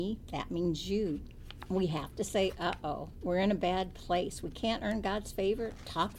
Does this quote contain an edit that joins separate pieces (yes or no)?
no